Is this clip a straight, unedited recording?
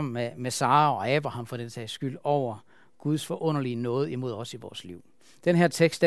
yes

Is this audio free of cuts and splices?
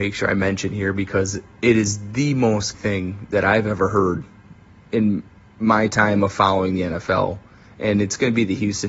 no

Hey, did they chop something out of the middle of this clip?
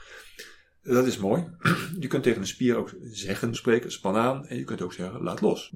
yes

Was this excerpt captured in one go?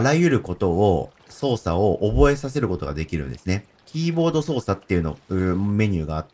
no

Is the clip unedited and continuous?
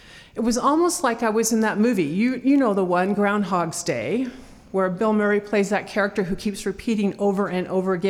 yes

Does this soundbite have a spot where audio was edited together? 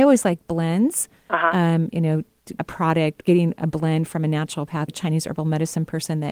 yes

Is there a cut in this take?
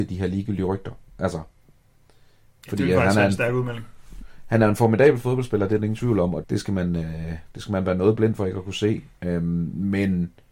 yes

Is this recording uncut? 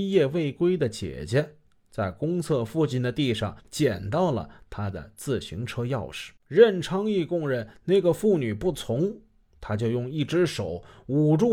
no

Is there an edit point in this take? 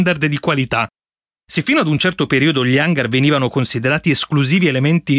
no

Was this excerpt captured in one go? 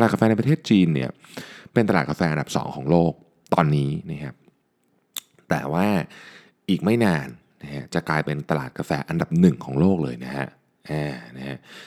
yes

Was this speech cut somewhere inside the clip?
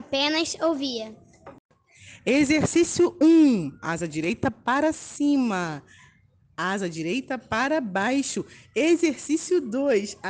no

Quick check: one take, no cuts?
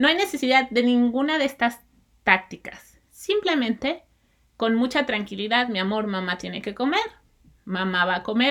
yes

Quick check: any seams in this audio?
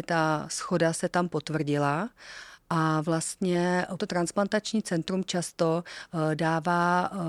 yes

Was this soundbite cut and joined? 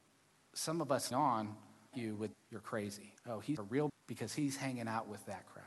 yes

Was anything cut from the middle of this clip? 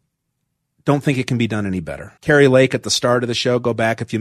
yes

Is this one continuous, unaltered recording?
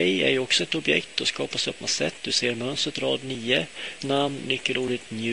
no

